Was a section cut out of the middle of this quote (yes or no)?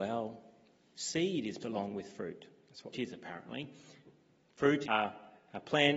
yes